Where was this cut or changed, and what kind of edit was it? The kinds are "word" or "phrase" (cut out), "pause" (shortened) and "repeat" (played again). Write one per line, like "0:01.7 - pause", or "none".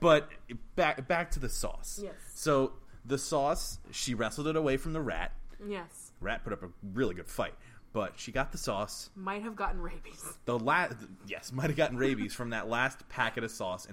none